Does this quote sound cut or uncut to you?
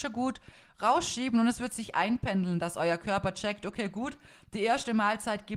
uncut